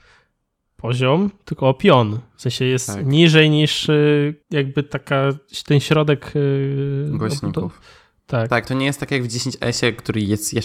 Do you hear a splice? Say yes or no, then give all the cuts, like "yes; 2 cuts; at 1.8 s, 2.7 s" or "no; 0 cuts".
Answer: yes; 2 cuts; at 4.4 s, 8.7 s